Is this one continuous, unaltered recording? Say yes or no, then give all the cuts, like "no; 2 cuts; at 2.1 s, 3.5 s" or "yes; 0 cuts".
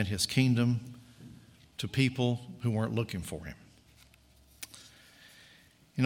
yes; 0 cuts